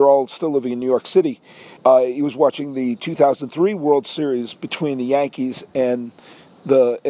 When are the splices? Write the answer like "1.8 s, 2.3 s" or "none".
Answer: 1.8 s